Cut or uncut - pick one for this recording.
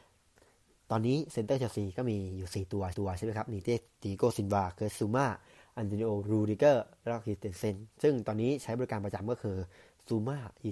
cut